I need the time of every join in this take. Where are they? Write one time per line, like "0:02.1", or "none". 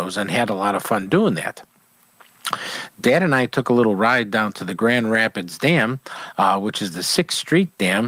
none